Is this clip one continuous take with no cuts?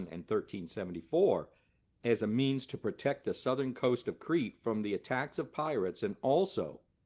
yes; 0 cuts

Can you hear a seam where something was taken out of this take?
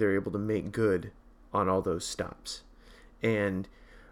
no; 0 cuts

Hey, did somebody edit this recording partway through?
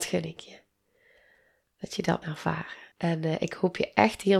yes; 2 cuts; at 2.2 s, 2.9 s

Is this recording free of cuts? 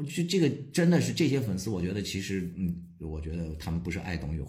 yes; 0 cuts

